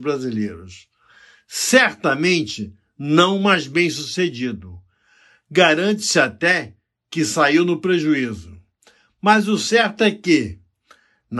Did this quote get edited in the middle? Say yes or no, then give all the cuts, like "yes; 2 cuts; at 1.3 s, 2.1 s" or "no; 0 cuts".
no; 0 cuts